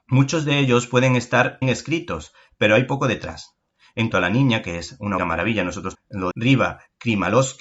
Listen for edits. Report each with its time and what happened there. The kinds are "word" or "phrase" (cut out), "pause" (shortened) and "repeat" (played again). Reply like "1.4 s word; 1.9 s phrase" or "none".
1.6 s word; 4.1 s word; 5.2 s word; 5.9 s word; 6.3 s word

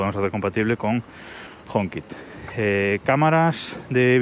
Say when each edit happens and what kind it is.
none

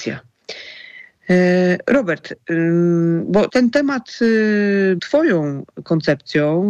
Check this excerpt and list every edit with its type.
3.5 s word; 5.0 s word

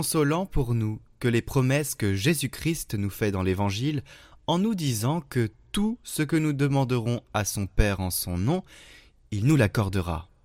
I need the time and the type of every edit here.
none

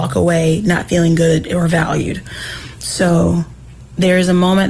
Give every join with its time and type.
none

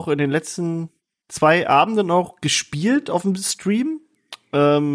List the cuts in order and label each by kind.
none

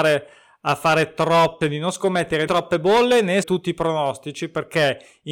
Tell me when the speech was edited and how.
1.6 s word; 2.5 s word; 3.4 s word

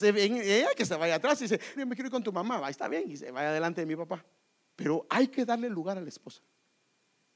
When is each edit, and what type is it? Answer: 1.8 s phrase; 4.4 s pause

